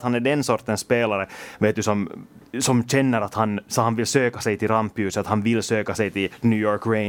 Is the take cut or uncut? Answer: uncut